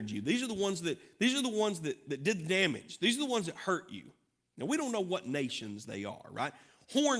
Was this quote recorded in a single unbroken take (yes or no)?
yes